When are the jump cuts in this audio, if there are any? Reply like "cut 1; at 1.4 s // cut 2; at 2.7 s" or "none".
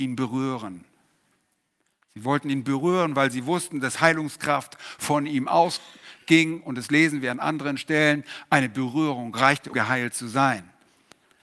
cut 1; at 9.7 s